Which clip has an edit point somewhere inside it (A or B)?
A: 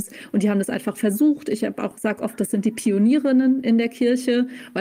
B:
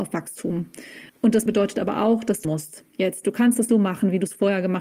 B